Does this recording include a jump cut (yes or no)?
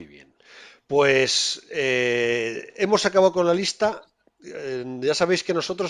no